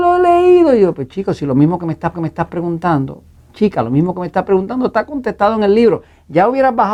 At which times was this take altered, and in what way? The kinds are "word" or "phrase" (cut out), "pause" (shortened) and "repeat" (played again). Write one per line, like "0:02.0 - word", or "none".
0:02.1 - repeat